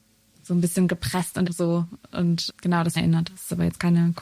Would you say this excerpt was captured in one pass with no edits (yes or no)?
no